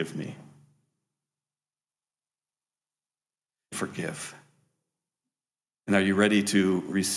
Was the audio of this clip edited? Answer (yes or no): yes